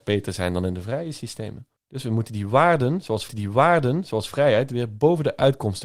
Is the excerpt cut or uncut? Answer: cut